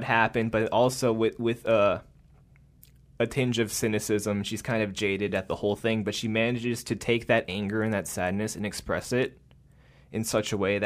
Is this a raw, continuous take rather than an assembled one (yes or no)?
yes